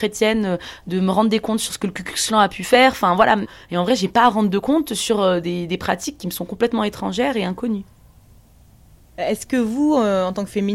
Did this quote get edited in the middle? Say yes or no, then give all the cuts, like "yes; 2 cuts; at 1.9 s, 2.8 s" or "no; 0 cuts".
no; 0 cuts